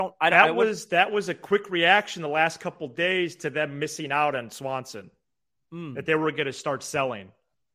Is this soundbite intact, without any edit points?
yes; 0 cuts

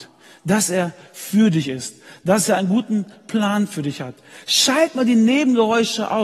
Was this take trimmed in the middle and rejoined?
no; 0 cuts

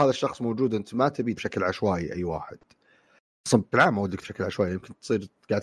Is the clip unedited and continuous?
no; 3 cuts; at 1.4 s, 3.7 s, 4.2 s

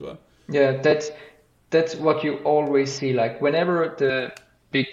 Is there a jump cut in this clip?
no; 0 cuts

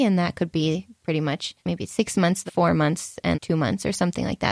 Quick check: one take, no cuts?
no; 3 cuts; at 1.6 s, 2.5 s, 3.3 s

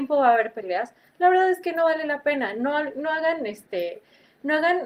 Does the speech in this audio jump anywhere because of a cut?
no; 0 cuts

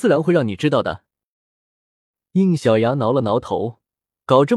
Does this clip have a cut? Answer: no; 0 cuts

